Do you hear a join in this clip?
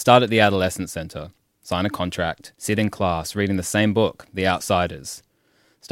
yes; 1 cut; at 2.6 s

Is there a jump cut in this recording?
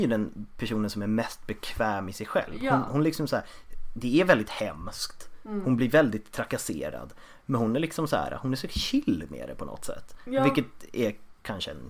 no; 0 cuts

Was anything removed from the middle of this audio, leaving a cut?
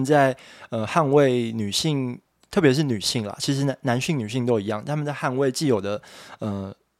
no; 0 cuts

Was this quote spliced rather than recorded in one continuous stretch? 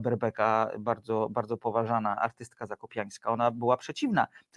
no; 0 cuts

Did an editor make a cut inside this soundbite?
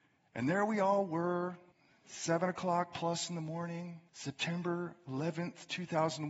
yes; 2 cuts; at 1.7 s, 4.1 s

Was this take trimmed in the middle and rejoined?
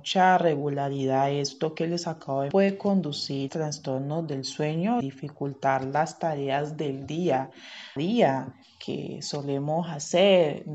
yes; 4 cuts; at 2.5 s, 3.5 s, 5.0 s, 8.0 s

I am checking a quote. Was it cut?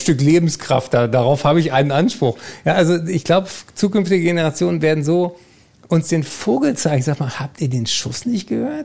no; 0 cuts

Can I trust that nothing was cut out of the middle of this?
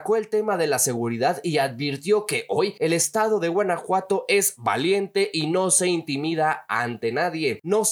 yes; 0 cuts

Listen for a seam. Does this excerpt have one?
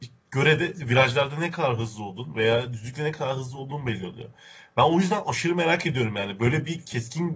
no; 0 cuts

